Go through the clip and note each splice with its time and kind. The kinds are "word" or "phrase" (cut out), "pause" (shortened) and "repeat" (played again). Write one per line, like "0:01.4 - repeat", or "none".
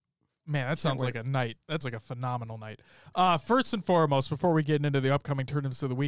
0:01.8 - word